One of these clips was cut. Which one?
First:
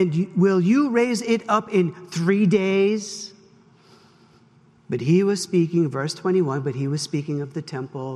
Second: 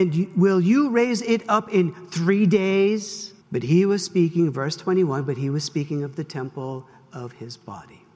second; 1 cut; at 3.4 s

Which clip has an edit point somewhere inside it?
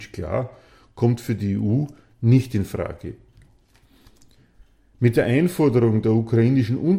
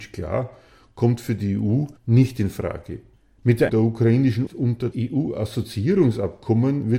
second; 5 cuts; at 2.0 s, 3.2 s, 3.7 s, 4.5 s, 4.9 s

